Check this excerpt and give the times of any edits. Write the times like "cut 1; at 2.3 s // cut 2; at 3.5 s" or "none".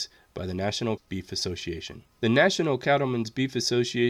cut 1; at 1.0 s // cut 2; at 2.1 s